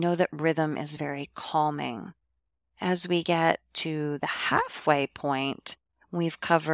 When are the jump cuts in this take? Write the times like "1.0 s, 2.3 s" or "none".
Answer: none